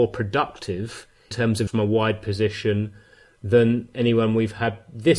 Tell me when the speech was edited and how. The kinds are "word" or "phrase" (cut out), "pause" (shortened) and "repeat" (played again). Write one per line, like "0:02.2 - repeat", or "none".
0:01.3 - word
0:01.7 - word